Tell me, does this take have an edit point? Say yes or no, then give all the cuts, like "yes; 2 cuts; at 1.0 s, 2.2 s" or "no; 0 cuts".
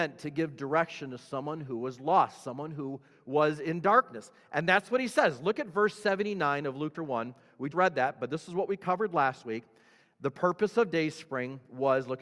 yes; 3 cuts; at 3.1 s, 6.9 s, 7.7 s